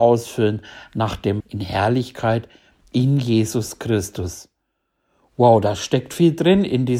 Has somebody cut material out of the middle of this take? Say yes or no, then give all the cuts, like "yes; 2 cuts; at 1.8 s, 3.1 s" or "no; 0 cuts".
yes; 1 cut; at 1.4 s